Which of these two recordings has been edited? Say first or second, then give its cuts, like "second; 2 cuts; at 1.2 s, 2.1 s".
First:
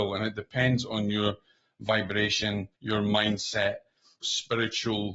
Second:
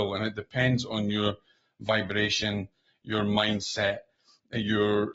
first; 2 cuts; at 2.7 s, 4.2 s